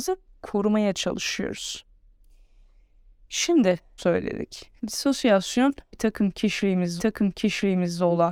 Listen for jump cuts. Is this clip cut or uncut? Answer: cut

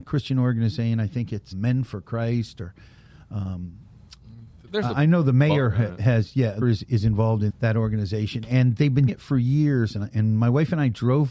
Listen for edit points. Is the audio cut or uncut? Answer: cut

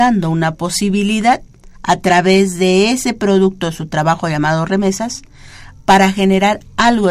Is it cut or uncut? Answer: cut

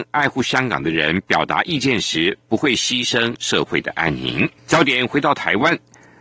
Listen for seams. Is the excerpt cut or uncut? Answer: cut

